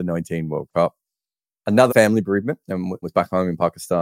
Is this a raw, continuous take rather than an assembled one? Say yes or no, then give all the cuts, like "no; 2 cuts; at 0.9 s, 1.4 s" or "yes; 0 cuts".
no; 2 cuts; at 1.9 s, 3.0 s